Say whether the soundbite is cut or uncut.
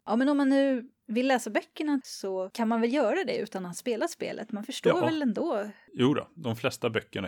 uncut